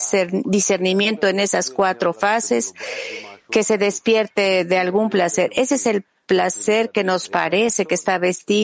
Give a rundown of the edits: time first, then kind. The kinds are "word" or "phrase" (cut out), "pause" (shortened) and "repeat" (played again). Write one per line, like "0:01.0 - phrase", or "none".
none